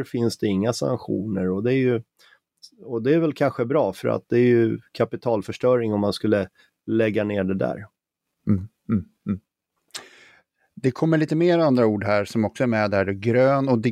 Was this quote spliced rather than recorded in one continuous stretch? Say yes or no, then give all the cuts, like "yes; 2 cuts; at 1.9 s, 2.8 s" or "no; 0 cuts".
no; 0 cuts